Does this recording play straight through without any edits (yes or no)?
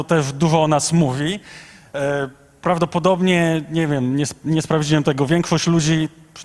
yes